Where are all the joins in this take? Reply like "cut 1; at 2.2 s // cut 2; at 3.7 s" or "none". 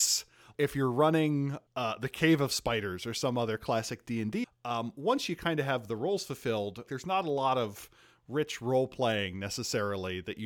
cut 1; at 4.4 s // cut 2; at 6.9 s